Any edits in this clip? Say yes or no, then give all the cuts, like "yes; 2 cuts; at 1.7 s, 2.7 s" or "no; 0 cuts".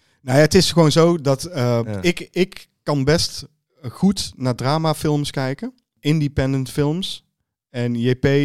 no; 0 cuts